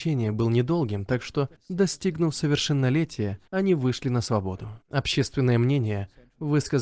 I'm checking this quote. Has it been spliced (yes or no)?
yes